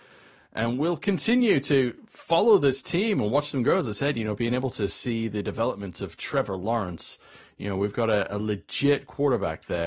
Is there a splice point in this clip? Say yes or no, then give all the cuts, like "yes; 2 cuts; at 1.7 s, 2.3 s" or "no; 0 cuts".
no; 0 cuts